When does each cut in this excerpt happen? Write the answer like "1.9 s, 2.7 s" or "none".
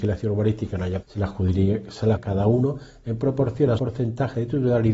1.0 s, 2.1 s, 3.8 s